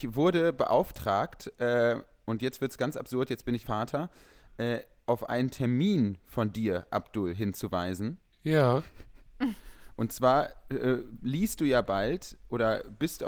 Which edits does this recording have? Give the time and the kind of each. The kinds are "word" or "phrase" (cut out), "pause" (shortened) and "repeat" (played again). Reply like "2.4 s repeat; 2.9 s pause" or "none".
3.6 s word